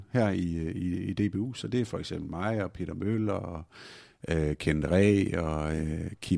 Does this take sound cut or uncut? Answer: uncut